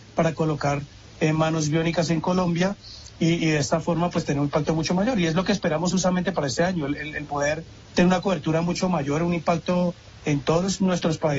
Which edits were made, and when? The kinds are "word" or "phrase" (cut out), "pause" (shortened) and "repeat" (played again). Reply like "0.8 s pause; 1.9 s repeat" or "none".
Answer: none